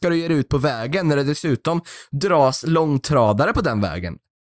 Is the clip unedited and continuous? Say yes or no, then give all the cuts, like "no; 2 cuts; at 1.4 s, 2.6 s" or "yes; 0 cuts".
yes; 0 cuts